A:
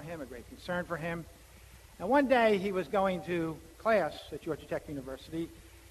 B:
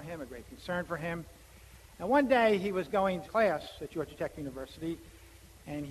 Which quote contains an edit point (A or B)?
B